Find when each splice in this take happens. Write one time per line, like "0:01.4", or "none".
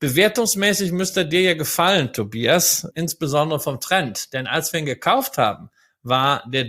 0:02.9